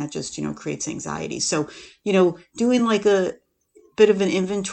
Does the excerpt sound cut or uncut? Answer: uncut